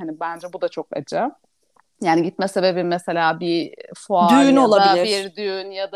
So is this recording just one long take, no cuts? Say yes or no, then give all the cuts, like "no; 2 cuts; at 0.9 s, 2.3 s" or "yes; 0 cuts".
yes; 0 cuts